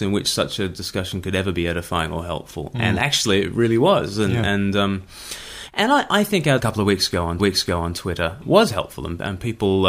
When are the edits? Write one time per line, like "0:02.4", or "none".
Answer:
0:06.6
0:07.4